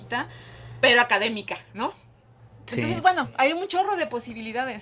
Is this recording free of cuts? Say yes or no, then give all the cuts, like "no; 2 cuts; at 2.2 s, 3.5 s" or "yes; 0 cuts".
yes; 0 cuts